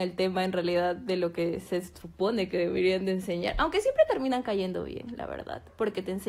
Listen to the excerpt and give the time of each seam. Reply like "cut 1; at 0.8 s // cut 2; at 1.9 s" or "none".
none